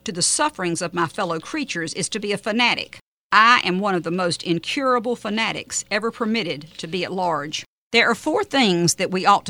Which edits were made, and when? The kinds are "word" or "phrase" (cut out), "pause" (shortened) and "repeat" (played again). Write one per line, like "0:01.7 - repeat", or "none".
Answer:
none